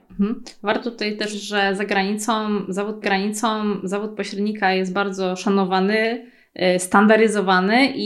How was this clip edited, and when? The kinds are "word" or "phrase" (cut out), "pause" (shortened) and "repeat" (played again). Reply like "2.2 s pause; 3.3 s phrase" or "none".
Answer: 1.3 s word; 3.0 s repeat

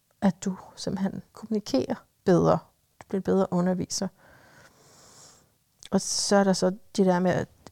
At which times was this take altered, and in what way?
1.3 s phrase

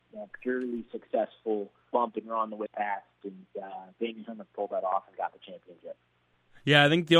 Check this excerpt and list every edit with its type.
1.8 s pause; 2.7 s phrase

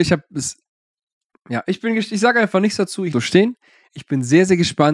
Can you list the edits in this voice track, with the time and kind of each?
3.1 s phrase

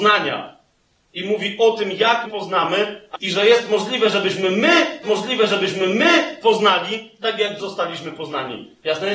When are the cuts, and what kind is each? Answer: 2.3 s word; 3.1 s phrase; 5.0 s repeat; 7.6 s word

